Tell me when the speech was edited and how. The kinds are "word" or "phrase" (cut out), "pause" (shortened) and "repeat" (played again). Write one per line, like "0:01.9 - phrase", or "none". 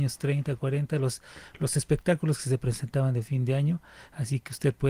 none